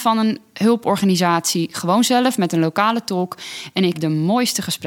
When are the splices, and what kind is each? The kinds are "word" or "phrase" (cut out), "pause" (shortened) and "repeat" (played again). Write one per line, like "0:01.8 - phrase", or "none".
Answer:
0:03.9 - word